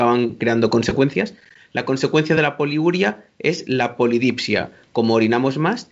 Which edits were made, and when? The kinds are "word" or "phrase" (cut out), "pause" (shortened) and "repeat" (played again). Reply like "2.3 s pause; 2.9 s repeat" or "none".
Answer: none